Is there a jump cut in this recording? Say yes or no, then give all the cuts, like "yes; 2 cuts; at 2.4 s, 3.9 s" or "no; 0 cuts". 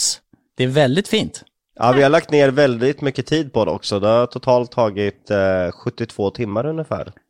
no; 0 cuts